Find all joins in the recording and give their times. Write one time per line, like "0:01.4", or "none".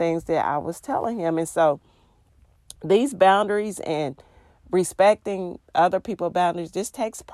0:05.6

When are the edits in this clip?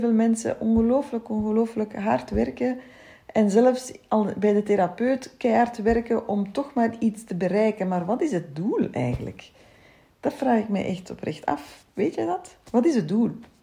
none

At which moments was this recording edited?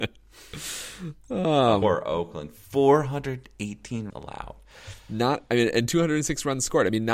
0:01.8
0:04.1

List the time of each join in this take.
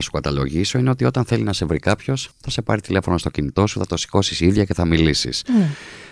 0:02.3

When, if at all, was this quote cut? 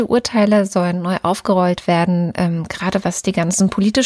none

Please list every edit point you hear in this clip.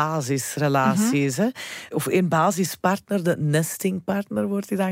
none

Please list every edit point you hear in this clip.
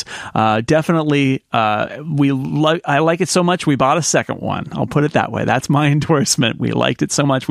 none

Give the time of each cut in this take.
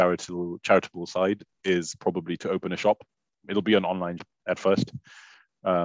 0:02.4
0:03.5
0:04.2

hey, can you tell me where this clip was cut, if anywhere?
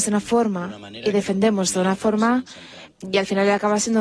0:02.9

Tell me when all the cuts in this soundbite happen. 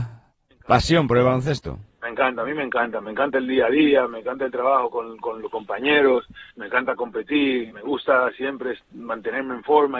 0:06.5
0:07.7

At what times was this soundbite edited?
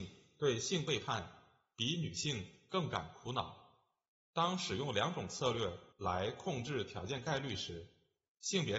0:05.9

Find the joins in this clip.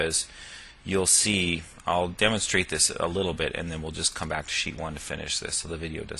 none

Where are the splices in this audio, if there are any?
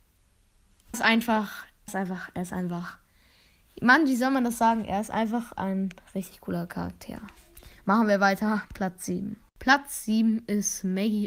0:00.9
0:01.9
0:05.6
0:08.7

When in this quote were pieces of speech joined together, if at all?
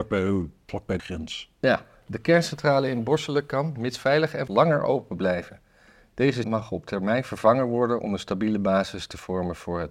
0:01.0
0:04.5
0:06.4

